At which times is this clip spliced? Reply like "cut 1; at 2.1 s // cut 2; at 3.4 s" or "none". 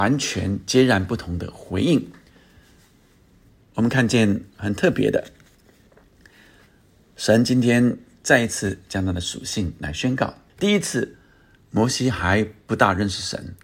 cut 1; at 10.5 s